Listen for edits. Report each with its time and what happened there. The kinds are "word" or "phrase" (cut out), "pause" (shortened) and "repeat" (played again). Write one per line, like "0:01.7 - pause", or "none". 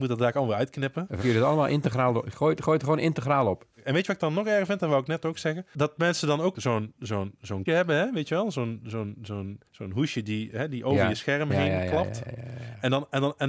0:01.2 - word
0:03.7 - pause
0:06.5 - word
0:07.7 - word
0:09.7 - pause